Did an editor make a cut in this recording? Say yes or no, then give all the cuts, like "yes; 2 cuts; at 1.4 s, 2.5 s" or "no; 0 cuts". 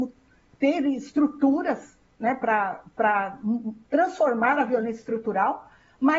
no; 0 cuts